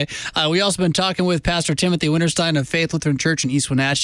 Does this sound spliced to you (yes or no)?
no